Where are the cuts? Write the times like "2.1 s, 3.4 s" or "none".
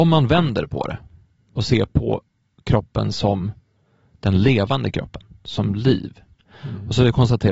none